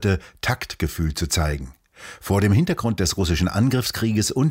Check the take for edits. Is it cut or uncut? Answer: uncut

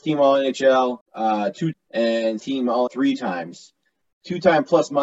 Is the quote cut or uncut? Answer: cut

